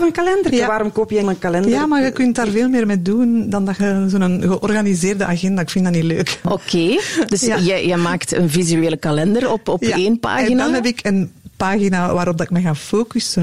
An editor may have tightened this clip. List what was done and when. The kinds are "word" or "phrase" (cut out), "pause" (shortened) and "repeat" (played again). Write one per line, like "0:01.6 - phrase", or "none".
0:01.2 - phrase